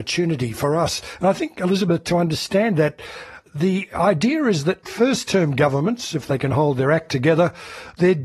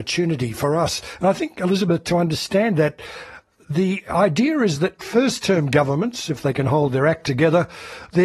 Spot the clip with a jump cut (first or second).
first